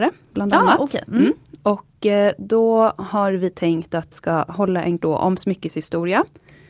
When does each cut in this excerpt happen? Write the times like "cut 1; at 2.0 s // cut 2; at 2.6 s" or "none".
cut 1; at 4.1 s // cut 2; at 4.5 s // cut 3; at 5.0 s